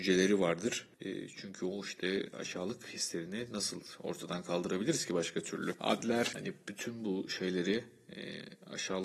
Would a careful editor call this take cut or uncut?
cut